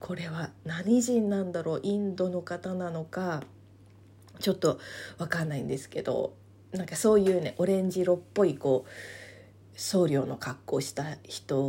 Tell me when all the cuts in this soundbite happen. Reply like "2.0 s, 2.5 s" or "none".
none